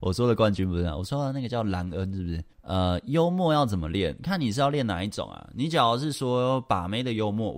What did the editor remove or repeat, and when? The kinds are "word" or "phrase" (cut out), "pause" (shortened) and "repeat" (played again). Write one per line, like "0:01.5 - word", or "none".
0:02.5 - pause